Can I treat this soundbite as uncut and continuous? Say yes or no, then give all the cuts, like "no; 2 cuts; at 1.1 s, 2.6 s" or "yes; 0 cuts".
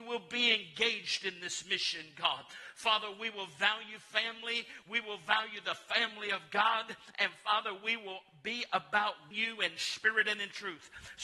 no; 1 cut; at 9.3 s